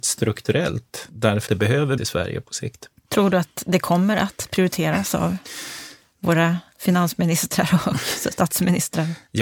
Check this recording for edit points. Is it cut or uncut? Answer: cut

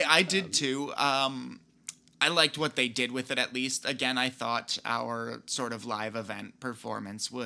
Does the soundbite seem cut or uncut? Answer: uncut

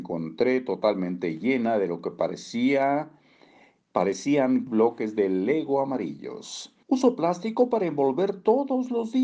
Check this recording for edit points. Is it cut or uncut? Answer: cut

